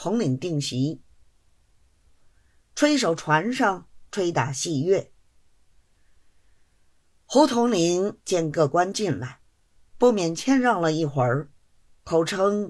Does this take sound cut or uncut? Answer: uncut